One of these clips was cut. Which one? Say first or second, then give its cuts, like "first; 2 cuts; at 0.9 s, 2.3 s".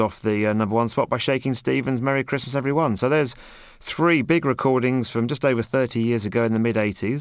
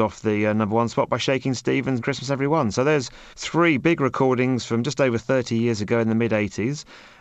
second; 2 cuts; at 2.0 s, 3.3 s